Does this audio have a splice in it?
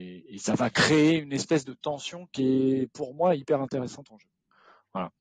no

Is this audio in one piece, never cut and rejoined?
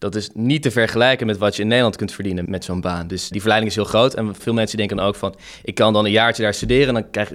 no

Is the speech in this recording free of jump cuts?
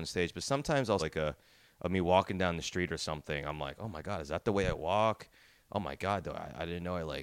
no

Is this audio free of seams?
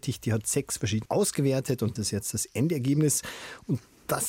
no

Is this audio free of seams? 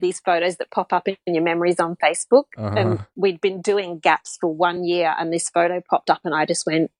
yes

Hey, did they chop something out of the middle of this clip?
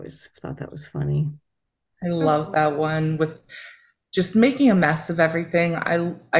no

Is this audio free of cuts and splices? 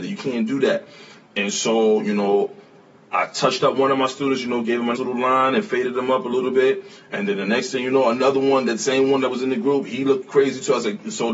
no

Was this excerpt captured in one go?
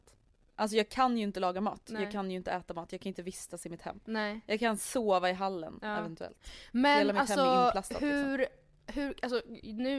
yes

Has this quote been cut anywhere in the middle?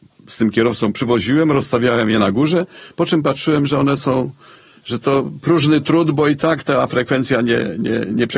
no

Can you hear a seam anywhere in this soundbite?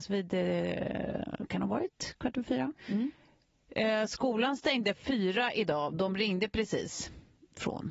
yes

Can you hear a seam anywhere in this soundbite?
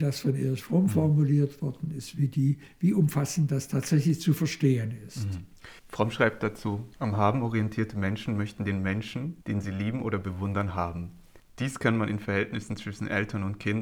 yes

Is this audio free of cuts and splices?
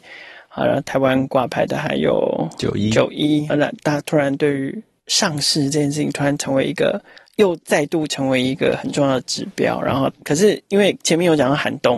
no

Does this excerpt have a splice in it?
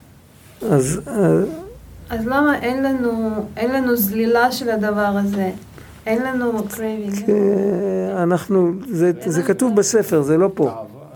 no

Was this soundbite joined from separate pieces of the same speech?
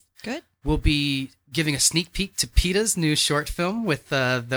no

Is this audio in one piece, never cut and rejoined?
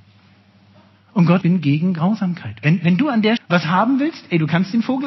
no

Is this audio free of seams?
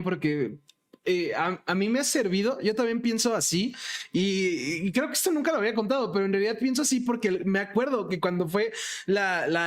yes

